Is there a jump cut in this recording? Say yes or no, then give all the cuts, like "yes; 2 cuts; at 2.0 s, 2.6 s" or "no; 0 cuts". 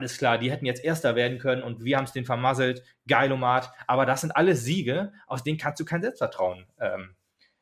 no; 0 cuts